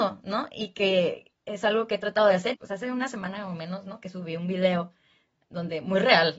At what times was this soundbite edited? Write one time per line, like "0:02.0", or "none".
0:02.5